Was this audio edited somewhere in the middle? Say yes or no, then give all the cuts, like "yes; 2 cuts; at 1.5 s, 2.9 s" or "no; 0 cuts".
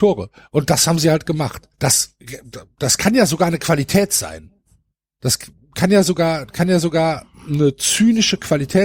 yes; 2 cuts; at 1.7 s, 4.9 s